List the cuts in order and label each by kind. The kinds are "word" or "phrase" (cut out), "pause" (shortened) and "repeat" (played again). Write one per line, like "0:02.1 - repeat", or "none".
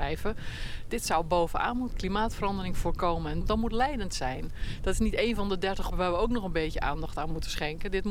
0:01.9 - word
0:03.4 - word
0:05.9 - word